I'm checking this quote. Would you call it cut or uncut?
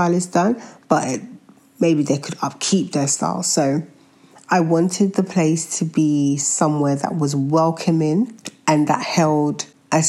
uncut